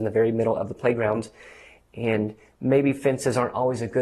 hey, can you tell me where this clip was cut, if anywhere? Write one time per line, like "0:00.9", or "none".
none